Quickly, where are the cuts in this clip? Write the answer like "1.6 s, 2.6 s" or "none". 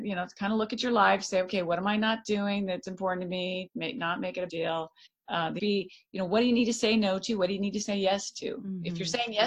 3.7 s, 4.5 s, 5.1 s, 5.6 s